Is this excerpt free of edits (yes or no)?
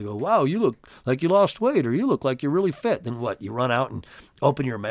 yes